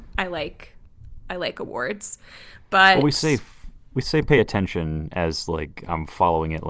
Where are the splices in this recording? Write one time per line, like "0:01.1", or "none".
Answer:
none